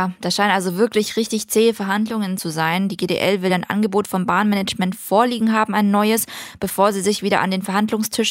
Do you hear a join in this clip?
no; 0 cuts

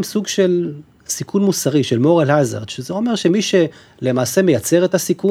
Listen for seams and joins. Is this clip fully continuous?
yes; 0 cuts

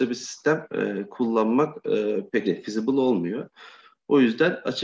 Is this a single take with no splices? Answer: no; 1 cut; at 2.4 s

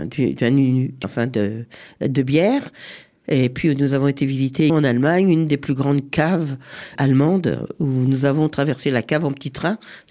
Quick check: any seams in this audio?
yes; 3 cuts; at 1.0 s, 4.7 s, 6.9 s

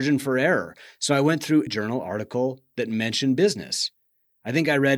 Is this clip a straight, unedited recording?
no; 1 cut; at 1.7 s

